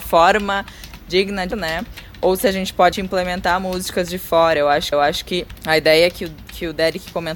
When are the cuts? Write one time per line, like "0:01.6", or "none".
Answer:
0:01.5
0:02.9
0:04.9